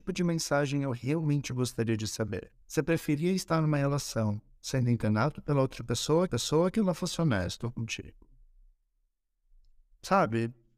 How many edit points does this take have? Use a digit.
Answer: 2